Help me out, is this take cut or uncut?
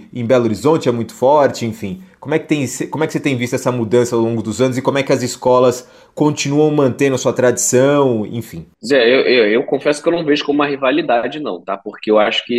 uncut